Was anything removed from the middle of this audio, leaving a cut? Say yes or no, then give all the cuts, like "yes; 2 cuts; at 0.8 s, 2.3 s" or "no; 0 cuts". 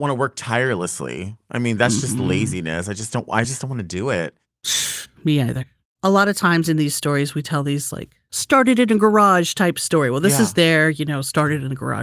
no; 0 cuts